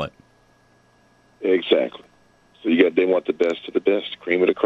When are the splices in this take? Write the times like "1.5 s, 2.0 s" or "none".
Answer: none